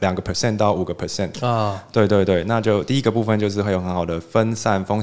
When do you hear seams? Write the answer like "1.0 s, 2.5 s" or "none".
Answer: none

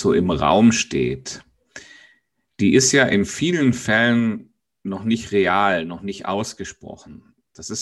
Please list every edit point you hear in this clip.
none

